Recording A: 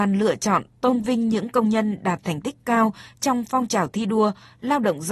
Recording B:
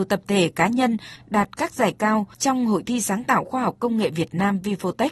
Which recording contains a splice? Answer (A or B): B